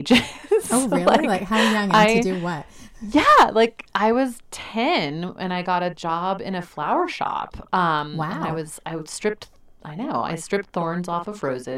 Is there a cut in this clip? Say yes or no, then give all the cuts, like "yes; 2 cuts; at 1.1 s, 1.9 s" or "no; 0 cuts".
no; 0 cuts